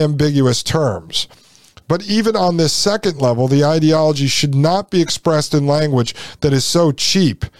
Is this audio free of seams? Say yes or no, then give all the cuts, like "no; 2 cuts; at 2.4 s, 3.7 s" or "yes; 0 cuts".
yes; 0 cuts